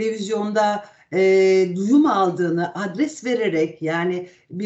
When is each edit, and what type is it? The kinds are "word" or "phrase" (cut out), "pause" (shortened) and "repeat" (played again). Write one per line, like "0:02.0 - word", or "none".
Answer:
none